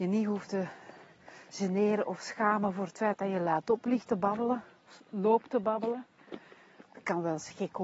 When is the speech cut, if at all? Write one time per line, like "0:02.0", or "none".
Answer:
0:05.0